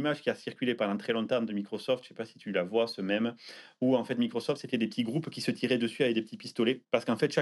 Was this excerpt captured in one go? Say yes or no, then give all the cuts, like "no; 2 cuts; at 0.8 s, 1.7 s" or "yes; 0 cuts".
yes; 0 cuts